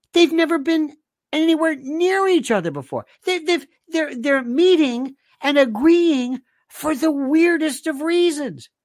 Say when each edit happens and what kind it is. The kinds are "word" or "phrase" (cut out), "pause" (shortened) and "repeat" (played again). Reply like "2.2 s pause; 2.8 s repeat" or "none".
none